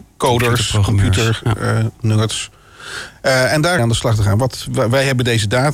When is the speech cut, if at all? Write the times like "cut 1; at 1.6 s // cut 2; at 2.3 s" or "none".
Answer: cut 1; at 3.8 s